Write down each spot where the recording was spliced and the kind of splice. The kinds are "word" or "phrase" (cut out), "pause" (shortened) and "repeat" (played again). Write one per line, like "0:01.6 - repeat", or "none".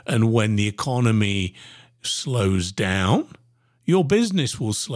none